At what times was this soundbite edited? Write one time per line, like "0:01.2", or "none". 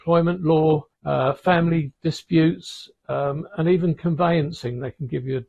0:00.9